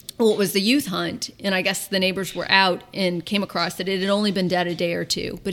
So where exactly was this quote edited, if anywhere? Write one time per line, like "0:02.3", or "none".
none

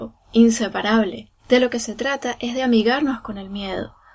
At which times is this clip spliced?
0:01.4

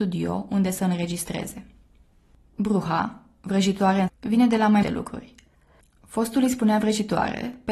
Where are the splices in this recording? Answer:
0:04.1
0:04.8

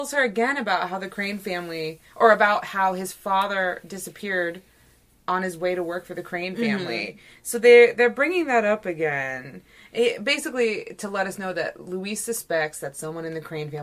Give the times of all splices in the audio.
none

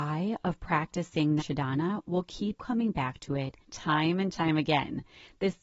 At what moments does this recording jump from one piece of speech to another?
0:01.4
0:02.6
0:03.6

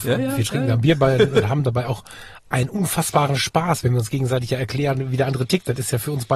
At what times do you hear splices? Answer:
none

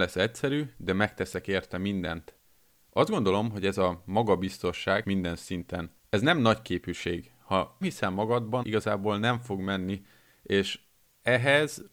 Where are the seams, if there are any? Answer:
0:05.0
0:06.0
0:07.8
0:08.6

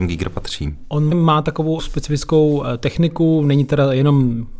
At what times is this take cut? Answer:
0:01.1

